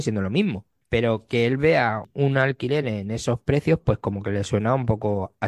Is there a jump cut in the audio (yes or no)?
no